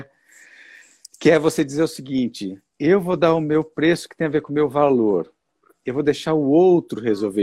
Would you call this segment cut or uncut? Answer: uncut